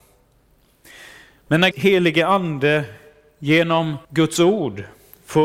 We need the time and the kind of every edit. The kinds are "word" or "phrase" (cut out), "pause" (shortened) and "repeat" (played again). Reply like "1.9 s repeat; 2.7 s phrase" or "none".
1.7 s word; 4.0 s pause